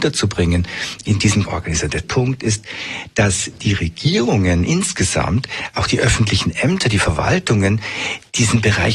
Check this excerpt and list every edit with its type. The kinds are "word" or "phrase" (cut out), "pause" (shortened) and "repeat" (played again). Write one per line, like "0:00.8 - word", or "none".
0:01.4 - word
0:02.0 - word
0:05.7 - word